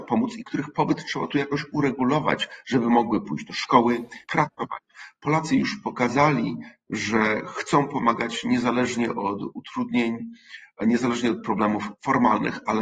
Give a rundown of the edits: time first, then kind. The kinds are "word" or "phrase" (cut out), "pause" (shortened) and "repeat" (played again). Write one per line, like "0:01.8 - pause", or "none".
0:04.2 - pause